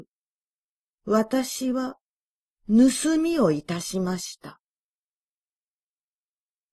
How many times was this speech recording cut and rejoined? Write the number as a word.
zero